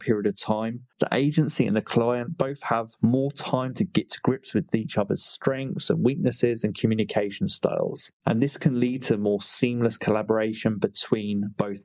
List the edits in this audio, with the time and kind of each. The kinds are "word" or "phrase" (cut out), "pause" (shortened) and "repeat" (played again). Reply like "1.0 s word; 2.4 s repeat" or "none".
none